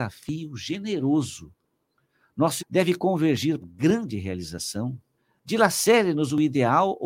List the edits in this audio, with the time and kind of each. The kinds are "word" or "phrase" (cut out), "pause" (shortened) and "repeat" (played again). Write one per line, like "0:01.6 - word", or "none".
0:02.6 - word
0:03.6 - phrase
0:05.2 - pause